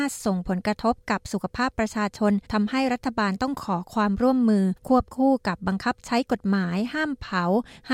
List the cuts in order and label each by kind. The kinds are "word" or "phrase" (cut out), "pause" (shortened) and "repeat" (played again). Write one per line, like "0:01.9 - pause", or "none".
0:02.4 - pause
0:04.8 - pause